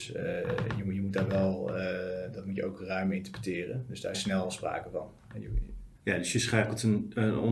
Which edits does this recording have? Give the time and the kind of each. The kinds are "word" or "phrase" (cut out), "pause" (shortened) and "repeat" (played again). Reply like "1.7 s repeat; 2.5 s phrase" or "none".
4.1 s phrase; 6.0 s pause